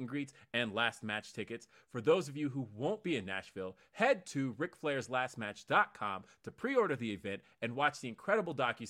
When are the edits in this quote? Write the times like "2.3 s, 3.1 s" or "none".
none